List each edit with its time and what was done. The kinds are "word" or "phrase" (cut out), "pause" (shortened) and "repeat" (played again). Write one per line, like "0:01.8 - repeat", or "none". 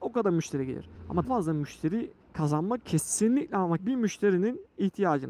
0:01.2 - word
0:02.8 - word
0:03.8 - word